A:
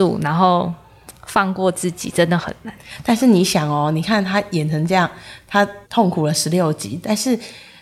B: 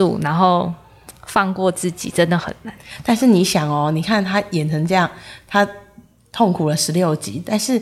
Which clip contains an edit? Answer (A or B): A